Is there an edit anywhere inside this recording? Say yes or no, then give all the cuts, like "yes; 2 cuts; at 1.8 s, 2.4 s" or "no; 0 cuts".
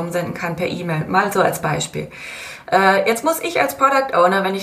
no; 0 cuts